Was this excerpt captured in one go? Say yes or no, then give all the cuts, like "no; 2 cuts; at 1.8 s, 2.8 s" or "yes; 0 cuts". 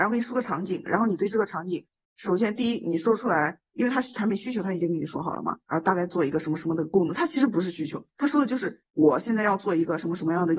no; 2 cuts; at 5.6 s, 8.1 s